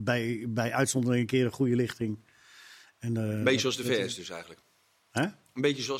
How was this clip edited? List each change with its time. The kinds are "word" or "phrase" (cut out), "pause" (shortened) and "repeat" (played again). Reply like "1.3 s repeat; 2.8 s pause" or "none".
none